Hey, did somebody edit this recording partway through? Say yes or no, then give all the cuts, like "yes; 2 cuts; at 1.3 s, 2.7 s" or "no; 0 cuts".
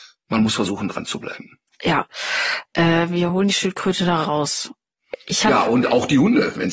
no; 0 cuts